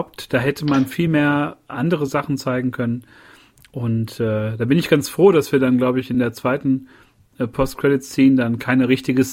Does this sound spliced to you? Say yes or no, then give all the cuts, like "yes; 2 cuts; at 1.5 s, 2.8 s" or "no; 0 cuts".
no; 0 cuts